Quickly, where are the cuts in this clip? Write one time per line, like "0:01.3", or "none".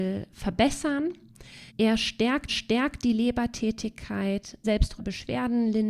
0:01.7
0:02.5
0:04.6
0:05.0

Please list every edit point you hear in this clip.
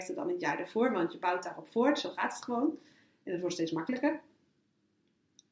none

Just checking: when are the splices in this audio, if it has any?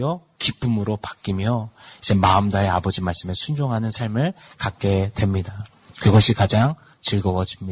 none

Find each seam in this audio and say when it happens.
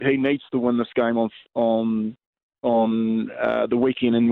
none

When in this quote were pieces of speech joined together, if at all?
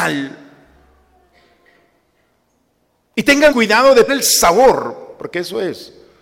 0:03.5
0:04.1

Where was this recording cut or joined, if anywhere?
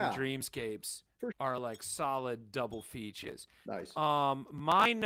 0:01.3

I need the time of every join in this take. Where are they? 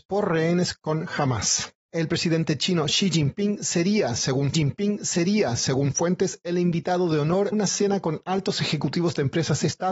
0:01.8
0:04.5
0:07.5

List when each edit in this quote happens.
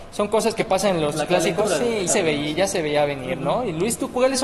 0:02.1

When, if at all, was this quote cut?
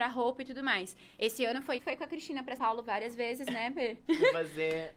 0:01.8
0:02.6

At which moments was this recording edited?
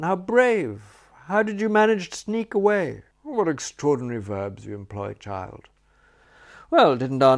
0:03.1

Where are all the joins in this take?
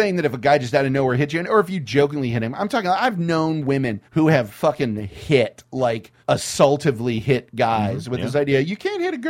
0:04.1
0:06.2

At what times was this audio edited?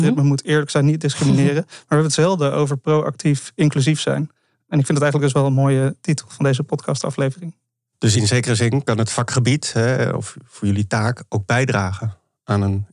none

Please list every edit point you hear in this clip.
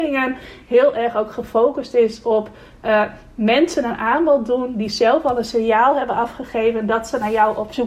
none

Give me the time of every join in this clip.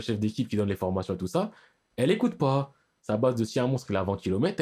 none

